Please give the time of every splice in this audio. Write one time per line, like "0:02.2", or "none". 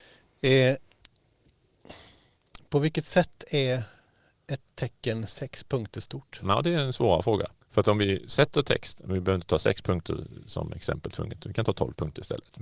0:07.6